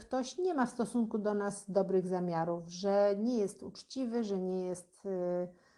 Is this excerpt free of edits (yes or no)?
yes